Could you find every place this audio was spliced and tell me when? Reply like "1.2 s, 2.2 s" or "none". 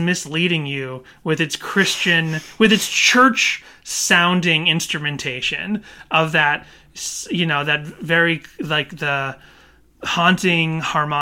none